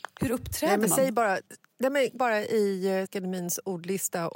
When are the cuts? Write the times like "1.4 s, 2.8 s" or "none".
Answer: 1.5 s, 2.2 s, 3.1 s